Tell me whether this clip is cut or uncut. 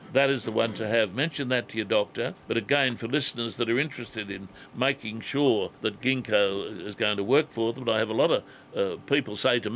cut